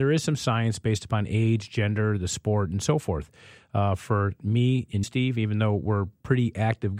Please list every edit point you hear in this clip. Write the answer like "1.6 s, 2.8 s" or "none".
5.0 s